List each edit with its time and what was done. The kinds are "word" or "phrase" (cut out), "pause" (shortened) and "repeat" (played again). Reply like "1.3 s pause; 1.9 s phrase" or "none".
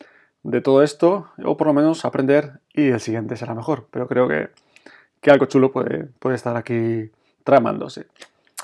none